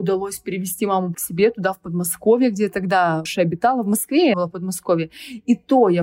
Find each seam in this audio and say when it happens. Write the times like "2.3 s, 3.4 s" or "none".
1.1 s, 3.3 s, 4.3 s